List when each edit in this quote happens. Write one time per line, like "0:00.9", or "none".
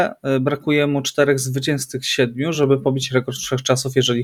none